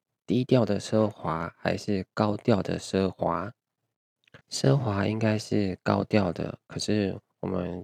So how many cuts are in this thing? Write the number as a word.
one